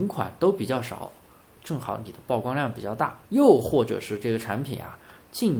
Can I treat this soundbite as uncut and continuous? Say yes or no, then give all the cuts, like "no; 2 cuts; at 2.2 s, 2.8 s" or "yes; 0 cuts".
no; 2 cuts; at 1.6 s, 3.2 s